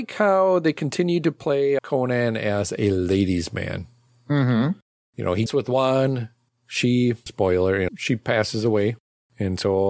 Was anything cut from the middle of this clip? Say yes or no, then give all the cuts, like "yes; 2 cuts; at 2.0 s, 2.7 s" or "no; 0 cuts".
yes; 4 cuts; at 1.8 s, 5.5 s, 7.3 s, 7.9 s